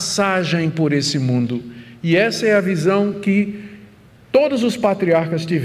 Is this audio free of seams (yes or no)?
yes